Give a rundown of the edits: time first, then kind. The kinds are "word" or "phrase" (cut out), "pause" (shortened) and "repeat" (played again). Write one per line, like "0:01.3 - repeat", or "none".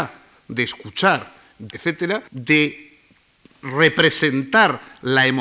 0:01.7 - word
0:02.3 - pause